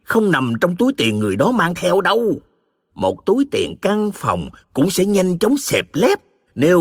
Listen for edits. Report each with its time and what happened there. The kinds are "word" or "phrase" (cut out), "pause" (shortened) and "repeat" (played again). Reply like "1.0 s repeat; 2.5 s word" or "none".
none